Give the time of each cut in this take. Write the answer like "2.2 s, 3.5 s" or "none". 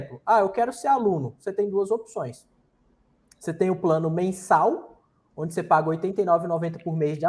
none